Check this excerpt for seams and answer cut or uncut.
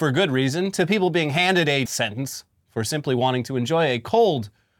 cut